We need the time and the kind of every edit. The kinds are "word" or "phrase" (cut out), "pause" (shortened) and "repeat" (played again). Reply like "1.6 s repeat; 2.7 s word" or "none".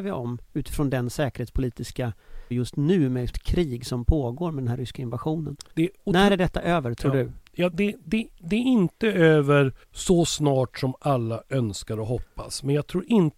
2.5 s phrase; 3.3 s phrase; 5.7 s pause; 7.7 s word; 9.8 s pause